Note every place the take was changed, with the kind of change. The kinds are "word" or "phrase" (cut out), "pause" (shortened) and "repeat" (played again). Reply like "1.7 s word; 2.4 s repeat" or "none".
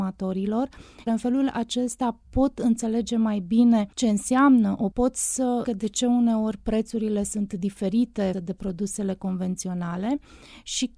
1.1 s word; 3.9 s pause; 4.9 s phrase; 5.6 s word; 8.3 s word